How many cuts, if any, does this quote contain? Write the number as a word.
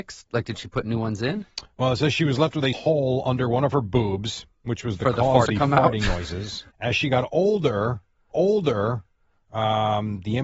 four